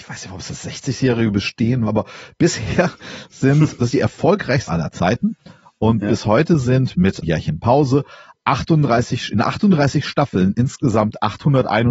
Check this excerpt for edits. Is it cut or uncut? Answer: cut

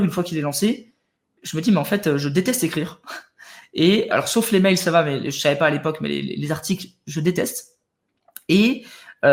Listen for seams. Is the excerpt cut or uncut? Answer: cut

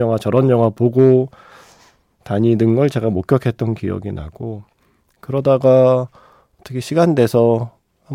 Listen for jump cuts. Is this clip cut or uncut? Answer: uncut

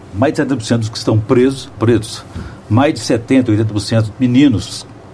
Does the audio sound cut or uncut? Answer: cut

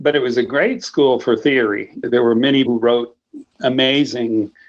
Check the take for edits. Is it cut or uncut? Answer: cut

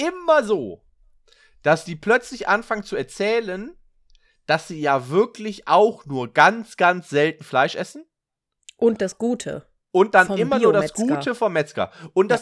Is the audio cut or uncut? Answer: uncut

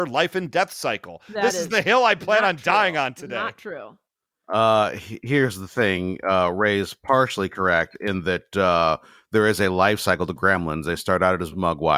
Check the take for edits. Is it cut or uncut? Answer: uncut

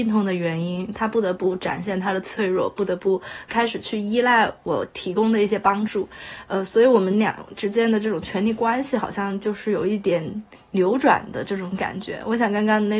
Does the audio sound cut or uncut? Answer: uncut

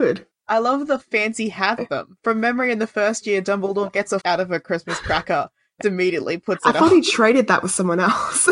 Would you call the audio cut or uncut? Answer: cut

